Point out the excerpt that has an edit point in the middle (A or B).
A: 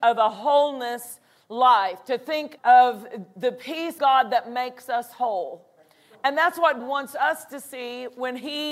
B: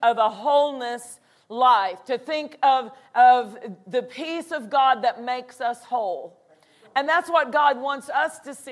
A